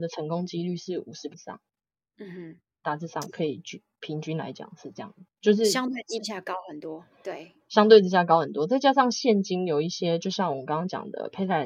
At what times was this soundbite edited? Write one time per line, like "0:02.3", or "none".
0:01.3